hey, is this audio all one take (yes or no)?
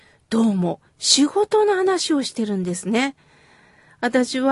yes